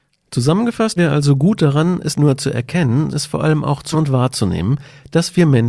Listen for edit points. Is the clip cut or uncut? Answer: cut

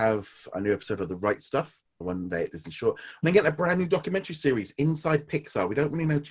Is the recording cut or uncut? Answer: cut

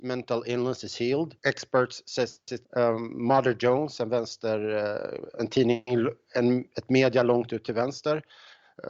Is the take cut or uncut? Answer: cut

